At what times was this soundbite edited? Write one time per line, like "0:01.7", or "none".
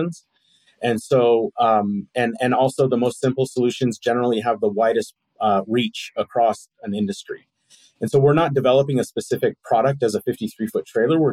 none